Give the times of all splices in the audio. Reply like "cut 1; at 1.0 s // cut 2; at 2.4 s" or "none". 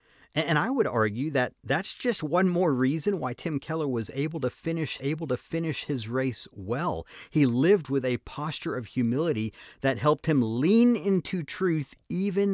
cut 1; at 1.6 s // cut 2; at 5.0 s